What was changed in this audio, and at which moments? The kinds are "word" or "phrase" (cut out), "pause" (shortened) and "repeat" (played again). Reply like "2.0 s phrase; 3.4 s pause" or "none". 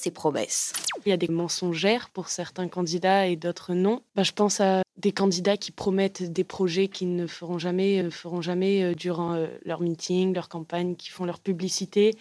1.3 s word; 4.1 s pause; 4.8 s word; 8.0 s repeat